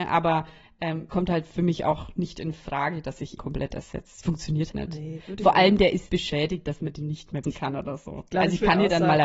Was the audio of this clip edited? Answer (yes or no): yes